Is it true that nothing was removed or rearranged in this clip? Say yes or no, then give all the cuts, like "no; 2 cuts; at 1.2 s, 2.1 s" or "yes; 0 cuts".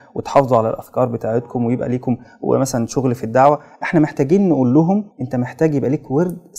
no; 1 cut; at 5.1 s